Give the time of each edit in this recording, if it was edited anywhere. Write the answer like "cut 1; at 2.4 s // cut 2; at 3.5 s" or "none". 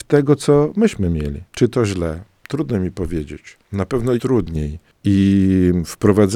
cut 1; at 1.5 s // cut 2; at 3.6 s // cut 3; at 4.2 s